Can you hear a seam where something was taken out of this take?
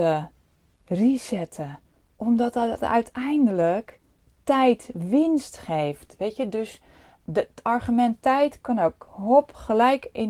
no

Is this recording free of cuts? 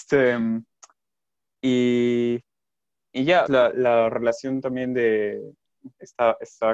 no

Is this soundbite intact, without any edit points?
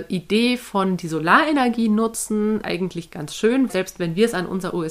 no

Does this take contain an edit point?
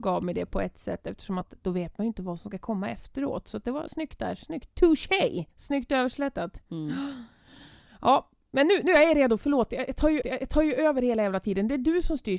yes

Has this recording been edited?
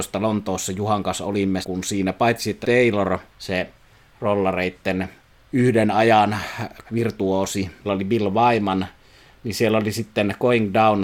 yes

